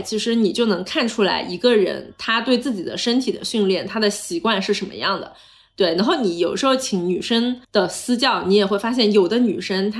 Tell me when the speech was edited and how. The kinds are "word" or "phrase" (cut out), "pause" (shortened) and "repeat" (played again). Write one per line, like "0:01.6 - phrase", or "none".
0:07.6 - pause